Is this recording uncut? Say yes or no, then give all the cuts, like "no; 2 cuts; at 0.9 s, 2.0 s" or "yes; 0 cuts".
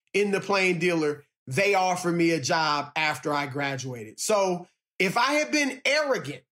yes; 0 cuts